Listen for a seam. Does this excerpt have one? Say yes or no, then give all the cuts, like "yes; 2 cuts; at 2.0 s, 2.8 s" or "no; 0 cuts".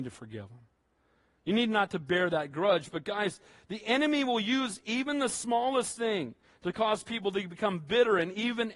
no; 0 cuts